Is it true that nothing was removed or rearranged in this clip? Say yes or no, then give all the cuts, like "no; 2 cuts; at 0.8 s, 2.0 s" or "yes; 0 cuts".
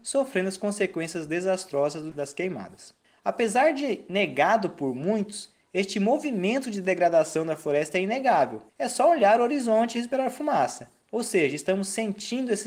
no; 3 cuts; at 2.1 s, 3.0 s, 8.7 s